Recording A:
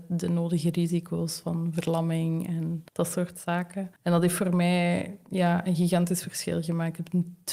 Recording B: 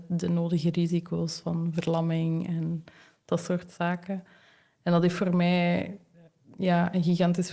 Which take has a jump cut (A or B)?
A